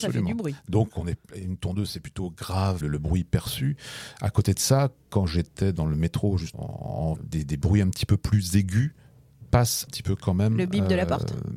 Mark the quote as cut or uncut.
cut